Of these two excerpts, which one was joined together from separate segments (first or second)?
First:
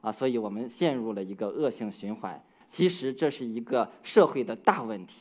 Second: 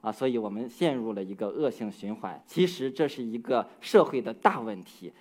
second